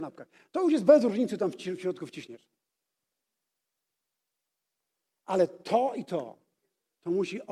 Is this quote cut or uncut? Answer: uncut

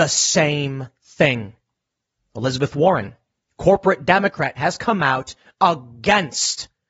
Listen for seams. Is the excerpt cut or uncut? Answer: uncut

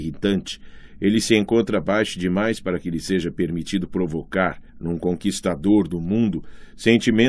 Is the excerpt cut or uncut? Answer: cut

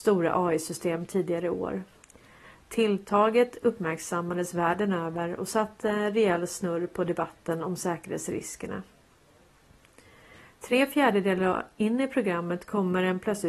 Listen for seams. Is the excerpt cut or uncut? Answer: uncut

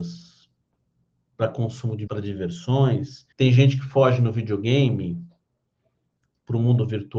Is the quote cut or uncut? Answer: cut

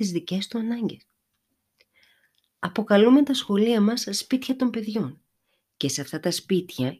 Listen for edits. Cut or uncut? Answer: uncut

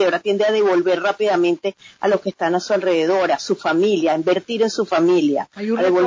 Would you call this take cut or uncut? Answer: uncut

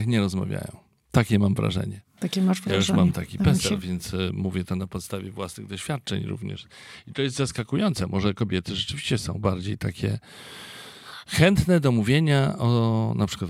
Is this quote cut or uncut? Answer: uncut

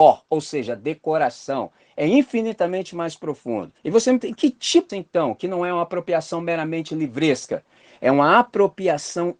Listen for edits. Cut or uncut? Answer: cut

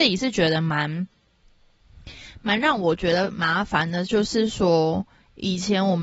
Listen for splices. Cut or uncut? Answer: uncut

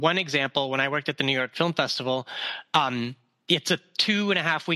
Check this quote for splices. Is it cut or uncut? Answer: uncut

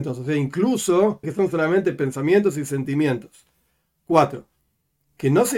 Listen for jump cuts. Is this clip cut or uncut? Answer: cut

